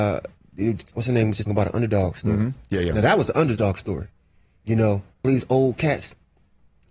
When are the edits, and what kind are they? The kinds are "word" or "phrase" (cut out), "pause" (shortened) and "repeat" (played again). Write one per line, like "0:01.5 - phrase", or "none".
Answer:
0:00.9 - word
0:01.5 - word
0:05.2 - word